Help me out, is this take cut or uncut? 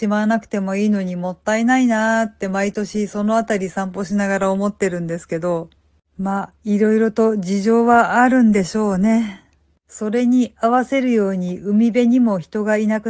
uncut